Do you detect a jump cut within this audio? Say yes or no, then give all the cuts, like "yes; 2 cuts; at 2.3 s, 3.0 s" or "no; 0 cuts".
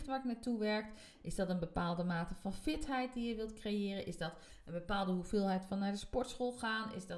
no; 0 cuts